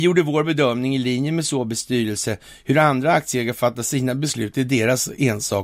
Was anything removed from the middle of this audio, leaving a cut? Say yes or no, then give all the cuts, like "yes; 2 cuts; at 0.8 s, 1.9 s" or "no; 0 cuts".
no; 0 cuts